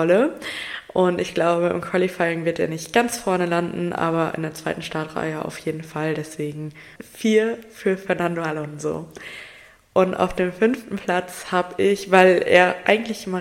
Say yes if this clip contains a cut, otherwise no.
no